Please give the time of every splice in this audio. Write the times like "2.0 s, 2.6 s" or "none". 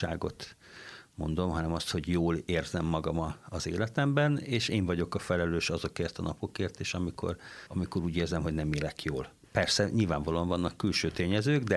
7.7 s, 9.4 s

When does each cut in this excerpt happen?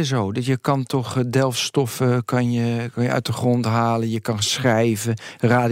none

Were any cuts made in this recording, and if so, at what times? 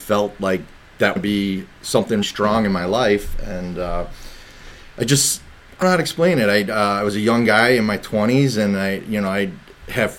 1.2 s, 2.2 s, 5.8 s

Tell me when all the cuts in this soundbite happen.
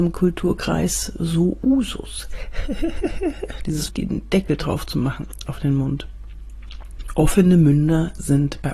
3.9 s

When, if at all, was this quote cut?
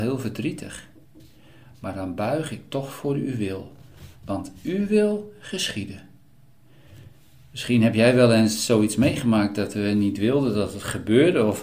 none

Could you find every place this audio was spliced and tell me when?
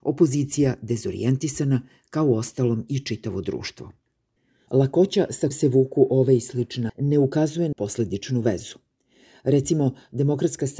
5.5 s, 6.9 s, 7.7 s

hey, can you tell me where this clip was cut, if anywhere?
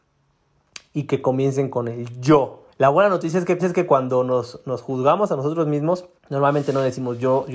2.7 s, 3.6 s, 6.2 s

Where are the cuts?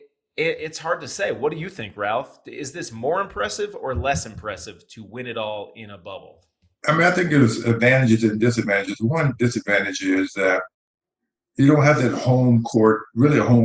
6.7 s

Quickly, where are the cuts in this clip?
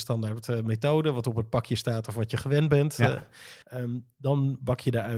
3.6 s

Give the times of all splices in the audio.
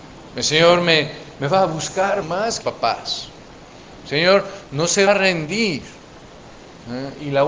2.2 s, 2.6 s, 5.1 s

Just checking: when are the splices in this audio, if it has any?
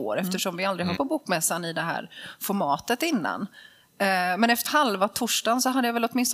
1.0 s, 4.7 s

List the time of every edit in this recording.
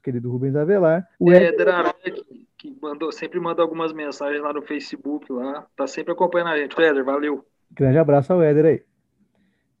1.1 s, 2.5 s, 5.7 s, 6.8 s

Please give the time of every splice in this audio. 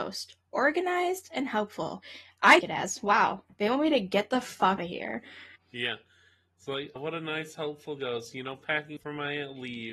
2.6 s, 4.8 s, 5.6 s, 7.0 s, 9.0 s

